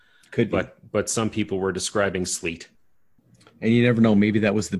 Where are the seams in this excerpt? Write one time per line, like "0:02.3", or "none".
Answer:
none